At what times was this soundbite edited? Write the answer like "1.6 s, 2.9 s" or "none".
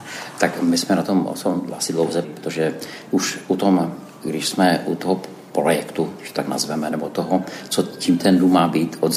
2.2 s